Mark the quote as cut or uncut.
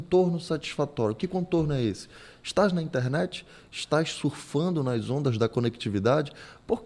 uncut